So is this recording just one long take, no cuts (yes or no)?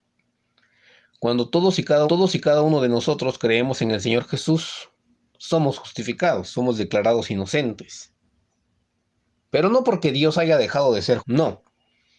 no